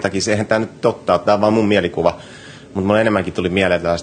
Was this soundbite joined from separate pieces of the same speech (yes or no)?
no